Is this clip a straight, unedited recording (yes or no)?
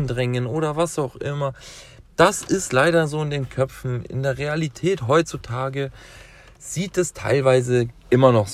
yes